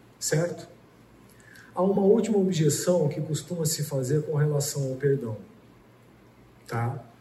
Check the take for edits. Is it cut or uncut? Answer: uncut